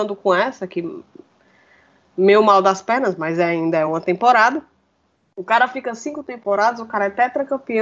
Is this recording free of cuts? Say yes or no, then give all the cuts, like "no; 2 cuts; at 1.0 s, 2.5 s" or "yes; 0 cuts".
yes; 0 cuts